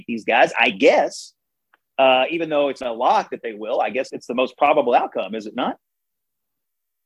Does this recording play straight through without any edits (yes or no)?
no